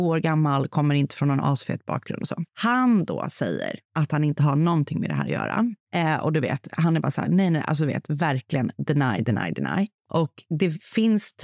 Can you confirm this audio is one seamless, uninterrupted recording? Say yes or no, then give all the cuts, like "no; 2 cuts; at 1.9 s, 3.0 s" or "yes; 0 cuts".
no; 4 cuts; at 2.5 s, 3.8 s, 5.8 s, 10.0 s